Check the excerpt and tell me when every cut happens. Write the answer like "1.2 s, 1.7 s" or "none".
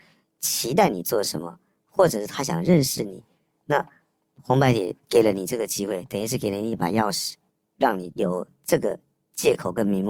5.0 s